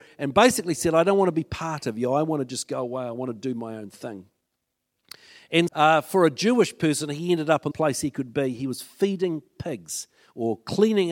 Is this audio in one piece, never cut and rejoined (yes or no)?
no